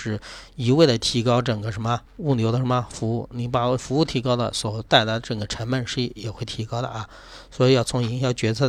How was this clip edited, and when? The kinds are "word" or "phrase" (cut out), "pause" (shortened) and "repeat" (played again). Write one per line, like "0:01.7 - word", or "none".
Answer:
0:02.1 - pause
0:04.9 - pause